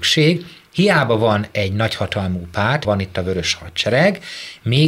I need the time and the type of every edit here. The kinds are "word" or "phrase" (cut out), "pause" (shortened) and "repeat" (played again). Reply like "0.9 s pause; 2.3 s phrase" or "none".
2.8 s word